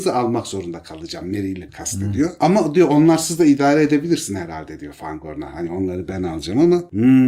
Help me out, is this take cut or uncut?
cut